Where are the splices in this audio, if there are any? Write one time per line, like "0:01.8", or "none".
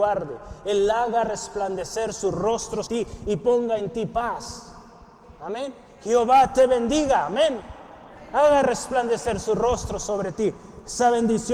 0:02.9